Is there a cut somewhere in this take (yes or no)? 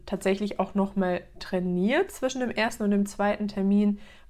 no